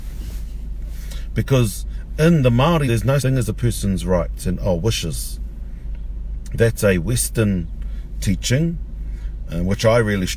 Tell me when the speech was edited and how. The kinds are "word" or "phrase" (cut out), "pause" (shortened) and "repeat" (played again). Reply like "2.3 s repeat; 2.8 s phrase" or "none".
2.9 s word; 3.2 s word